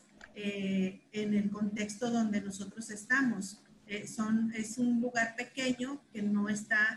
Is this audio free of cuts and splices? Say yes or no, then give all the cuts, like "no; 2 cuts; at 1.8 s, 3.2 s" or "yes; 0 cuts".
yes; 0 cuts